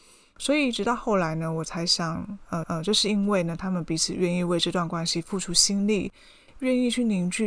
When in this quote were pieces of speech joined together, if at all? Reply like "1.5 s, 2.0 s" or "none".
2.6 s